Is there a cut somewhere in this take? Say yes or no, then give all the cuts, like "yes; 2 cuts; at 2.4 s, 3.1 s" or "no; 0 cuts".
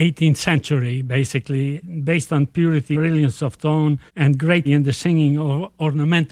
yes; 4 cuts; at 1.8 s, 2.9 s, 4.1 s, 4.7 s